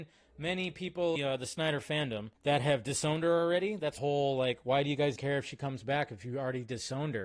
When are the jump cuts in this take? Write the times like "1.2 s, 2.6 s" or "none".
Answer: 1.2 s, 2.4 s, 4.0 s, 5.2 s